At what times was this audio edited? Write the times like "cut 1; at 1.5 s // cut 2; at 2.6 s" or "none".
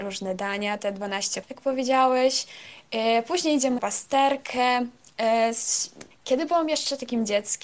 cut 1; at 1.4 s // cut 2; at 3.8 s // cut 3; at 6.1 s